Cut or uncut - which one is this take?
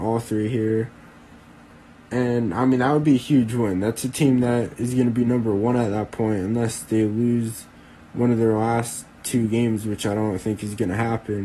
uncut